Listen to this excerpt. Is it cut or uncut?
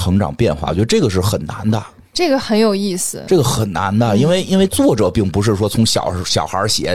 uncut